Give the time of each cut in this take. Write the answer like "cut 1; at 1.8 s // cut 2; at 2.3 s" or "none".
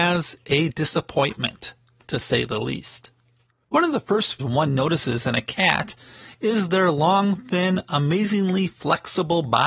cut 1; at 4.4 s